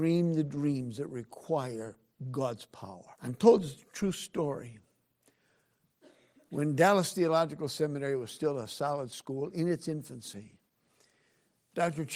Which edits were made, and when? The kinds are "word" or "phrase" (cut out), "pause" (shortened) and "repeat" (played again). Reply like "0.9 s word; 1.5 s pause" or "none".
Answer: 3.1 s pause